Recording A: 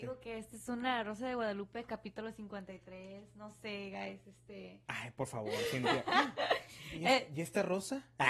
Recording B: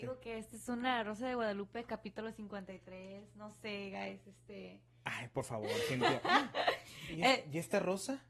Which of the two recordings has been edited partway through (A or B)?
A